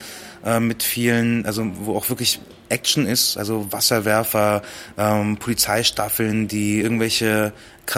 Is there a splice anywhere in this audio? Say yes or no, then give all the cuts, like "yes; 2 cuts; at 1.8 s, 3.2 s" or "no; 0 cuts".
yes; 1 cut; at 6.8 s